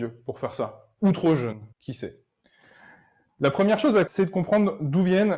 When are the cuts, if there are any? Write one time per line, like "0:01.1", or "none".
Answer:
0:01.7
0:04.1